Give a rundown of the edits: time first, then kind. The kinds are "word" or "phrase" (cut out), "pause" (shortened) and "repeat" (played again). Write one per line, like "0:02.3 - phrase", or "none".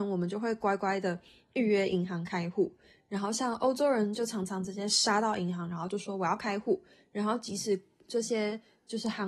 none